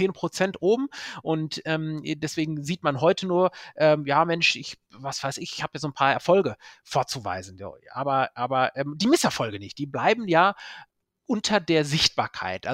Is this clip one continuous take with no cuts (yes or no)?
yes